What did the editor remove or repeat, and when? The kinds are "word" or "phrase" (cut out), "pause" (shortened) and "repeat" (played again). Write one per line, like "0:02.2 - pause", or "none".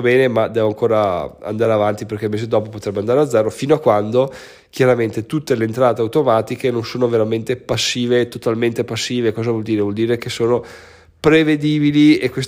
none